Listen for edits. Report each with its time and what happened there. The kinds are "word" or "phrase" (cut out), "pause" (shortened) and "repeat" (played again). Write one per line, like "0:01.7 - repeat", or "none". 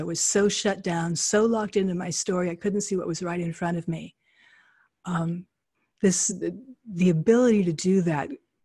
none